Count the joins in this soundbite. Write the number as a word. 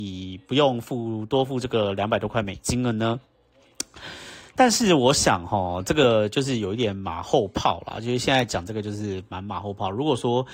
one